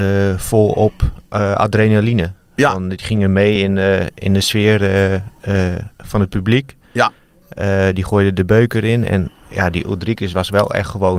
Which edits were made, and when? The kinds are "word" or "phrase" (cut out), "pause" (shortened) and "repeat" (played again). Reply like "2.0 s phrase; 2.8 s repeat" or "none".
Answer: none